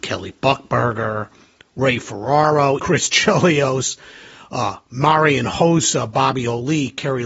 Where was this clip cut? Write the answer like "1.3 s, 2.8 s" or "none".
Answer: 2.8 s